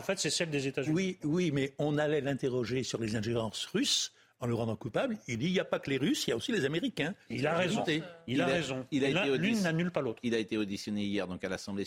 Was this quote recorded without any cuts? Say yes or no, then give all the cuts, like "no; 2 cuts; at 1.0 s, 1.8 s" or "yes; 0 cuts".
yes; 0 cuts